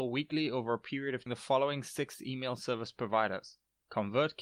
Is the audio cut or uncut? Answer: cut